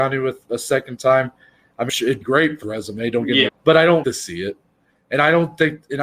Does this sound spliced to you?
yes; 5 cuts; at 1.9 s, 2.2 s, 2.6 s, 3.5 s, 4.0 s

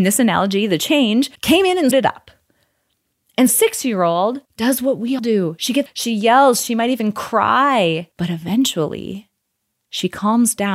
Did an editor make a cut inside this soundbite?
yes; 8 cuts; at 1.4 s, 1.9 s, 3.5 s, 4.5 s, 5.2 s, 5.9 s, 6.7 s, 8.1 s

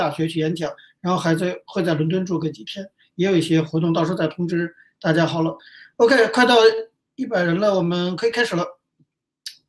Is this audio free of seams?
yes; 0 cuts

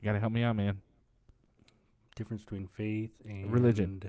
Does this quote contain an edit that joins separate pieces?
no; 0 cuts

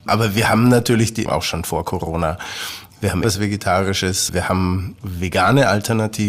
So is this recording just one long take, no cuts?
no; 3 cuts; at 1.3 s, 3.2 s, 4.3 s

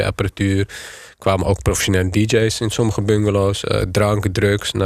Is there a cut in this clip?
no; 0 cuts

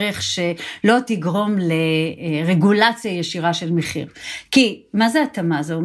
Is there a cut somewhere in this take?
no; 0 cuts

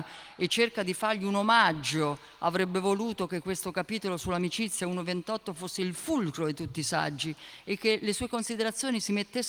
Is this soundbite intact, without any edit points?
yes; 0 cuts

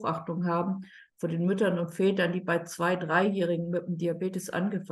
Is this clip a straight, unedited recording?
yes; 0 cuts

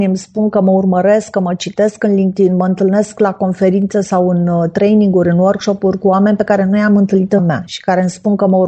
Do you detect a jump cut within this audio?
yes; 1 cut; at 7.4 s

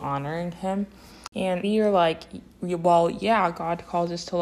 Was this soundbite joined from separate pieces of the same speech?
yes; 2 cuts; at 1.6 s, 2.5 s

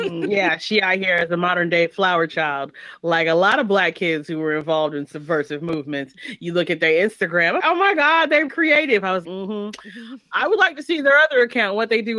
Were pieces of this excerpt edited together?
yes; 3 cuts; at 7.6 s, 8.5 s, 9.2 s

